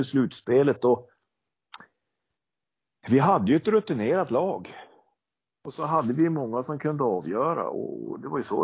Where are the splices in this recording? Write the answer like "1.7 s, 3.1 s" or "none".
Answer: none